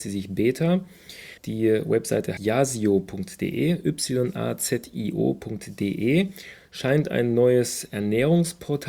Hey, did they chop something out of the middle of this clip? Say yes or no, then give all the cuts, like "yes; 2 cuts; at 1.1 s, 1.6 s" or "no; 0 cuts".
yes; 2 cuts; at 1.4 s, 2.4 s